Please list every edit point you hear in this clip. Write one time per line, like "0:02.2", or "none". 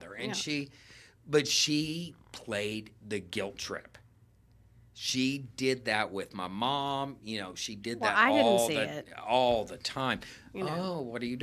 none